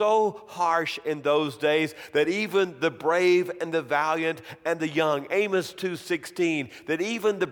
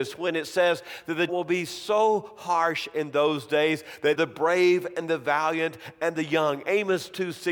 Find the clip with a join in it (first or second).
second